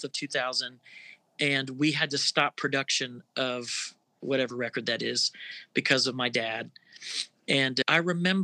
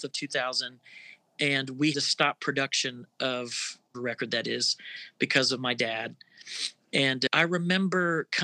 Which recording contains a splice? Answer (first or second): second